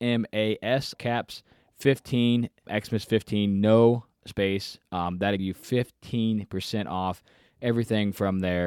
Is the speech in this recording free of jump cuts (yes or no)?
no